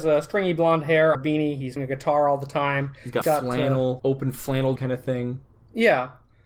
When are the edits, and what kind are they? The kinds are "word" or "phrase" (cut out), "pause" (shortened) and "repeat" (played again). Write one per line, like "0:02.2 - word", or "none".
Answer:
0:01.1 - word
0:01.8 - word
0:03.2 - word
0:04.0 - word
0:04.8 - word